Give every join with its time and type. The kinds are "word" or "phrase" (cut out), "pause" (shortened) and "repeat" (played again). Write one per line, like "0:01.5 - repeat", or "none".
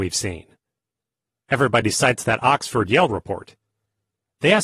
none